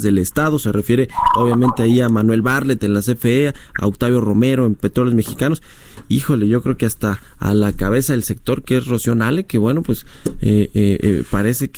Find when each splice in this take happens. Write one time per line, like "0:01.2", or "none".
none